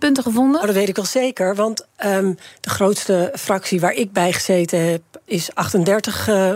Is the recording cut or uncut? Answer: uncut